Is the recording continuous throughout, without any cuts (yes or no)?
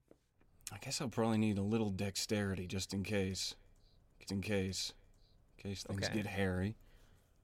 no